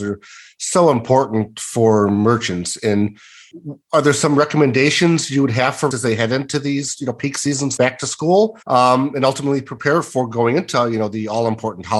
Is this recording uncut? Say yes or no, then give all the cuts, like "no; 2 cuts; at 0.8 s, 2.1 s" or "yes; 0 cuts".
no; 3 cuts; at 5.9 s, 7.8 s, 8.6 s